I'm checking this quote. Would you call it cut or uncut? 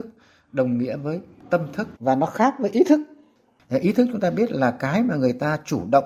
cut